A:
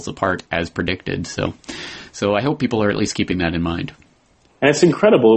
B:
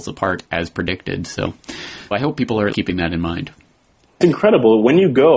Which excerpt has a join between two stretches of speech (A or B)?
B